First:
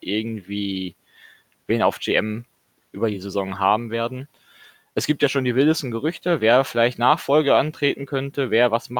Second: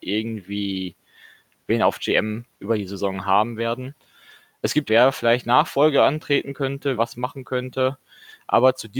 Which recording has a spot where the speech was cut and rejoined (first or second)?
second